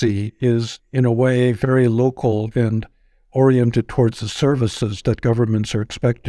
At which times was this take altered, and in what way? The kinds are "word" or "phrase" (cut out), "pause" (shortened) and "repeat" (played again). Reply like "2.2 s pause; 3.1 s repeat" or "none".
none